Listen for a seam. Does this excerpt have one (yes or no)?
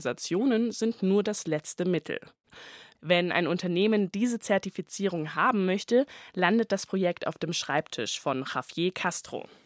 no